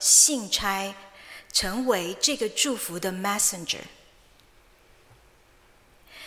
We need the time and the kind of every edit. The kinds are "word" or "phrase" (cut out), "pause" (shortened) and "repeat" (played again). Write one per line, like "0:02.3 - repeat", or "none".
none